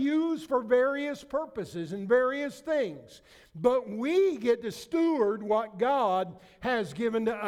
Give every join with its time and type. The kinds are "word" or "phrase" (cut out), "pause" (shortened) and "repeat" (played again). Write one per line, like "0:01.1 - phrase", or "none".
none